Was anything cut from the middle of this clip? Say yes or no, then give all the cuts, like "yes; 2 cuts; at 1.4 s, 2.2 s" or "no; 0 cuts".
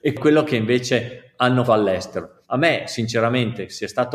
yes; 2 cuts; at 1.7 s, 2.4 s